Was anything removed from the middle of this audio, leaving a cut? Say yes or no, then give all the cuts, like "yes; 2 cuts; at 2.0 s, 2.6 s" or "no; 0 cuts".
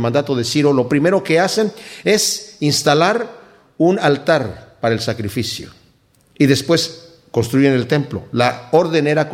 no; 0 cuts